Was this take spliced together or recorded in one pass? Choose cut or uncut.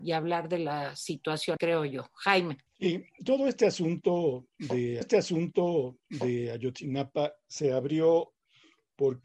cut